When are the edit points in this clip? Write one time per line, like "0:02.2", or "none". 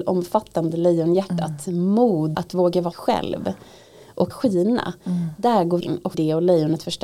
0:02.3
0:02.9
0:04.3
0:05.8
0:06.1